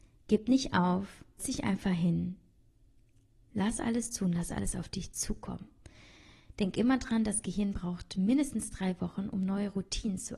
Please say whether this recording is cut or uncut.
cut